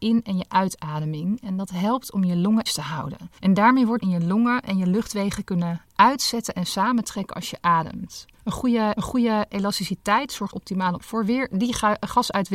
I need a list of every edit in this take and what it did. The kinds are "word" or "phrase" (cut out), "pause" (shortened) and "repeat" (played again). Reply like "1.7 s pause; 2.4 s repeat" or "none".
2.7 s word; 3.4 s pause; 4.0 s phrase; 8.3 s pause; 9.0 s repeat; 10.5 s word; 11.0 s word